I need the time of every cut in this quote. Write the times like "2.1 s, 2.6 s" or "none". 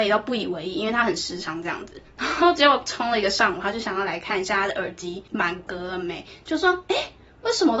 5.3 s